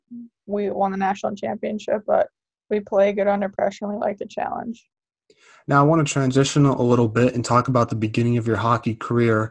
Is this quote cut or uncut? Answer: uncut